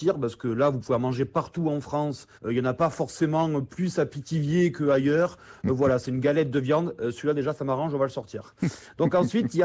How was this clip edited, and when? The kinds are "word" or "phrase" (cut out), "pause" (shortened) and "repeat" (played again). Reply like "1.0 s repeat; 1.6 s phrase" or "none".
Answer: 2.3 s pause

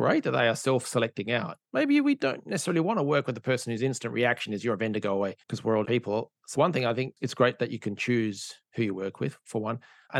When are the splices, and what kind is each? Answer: 1.6 s pause; 5.4 s pause; 5.8 s word; 6.5 s word

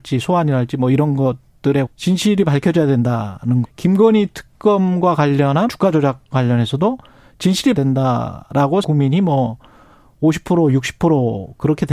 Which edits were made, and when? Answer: 1.9 s word; 3.6 s word; 5.7 s word; 6.3 s word; 7.7 s word; 8.8 s word

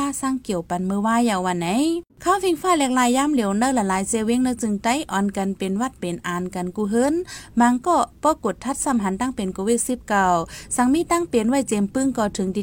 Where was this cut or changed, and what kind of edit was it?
2.1 s pause

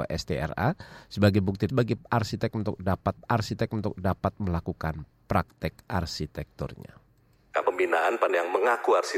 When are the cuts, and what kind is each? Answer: 1.7 s word; 3.2 s repeat; 7.6 s phrase; 8.3 s word

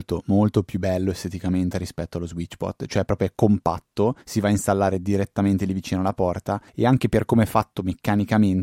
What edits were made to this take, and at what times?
4.2 s pause; 6.7 s pause

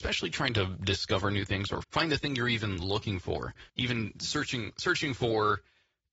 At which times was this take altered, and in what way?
1.8 s word; 3.7 s pause

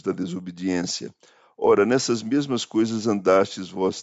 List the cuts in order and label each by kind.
none

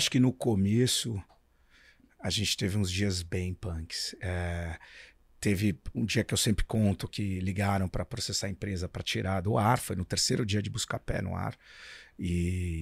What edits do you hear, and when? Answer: 7.1 s phrase

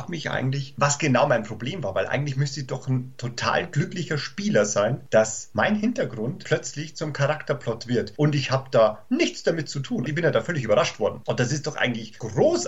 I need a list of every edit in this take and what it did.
none

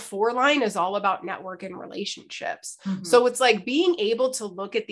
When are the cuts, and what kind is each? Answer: none

